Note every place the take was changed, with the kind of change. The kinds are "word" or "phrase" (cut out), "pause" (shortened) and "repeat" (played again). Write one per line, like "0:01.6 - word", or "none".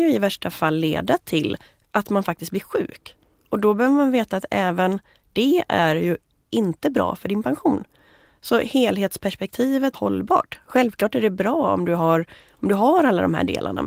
0:09.9 - word